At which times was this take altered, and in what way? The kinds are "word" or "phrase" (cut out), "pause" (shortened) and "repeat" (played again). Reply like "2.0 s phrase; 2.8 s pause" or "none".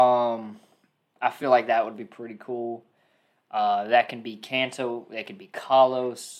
none